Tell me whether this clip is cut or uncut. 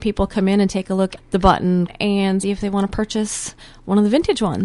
cut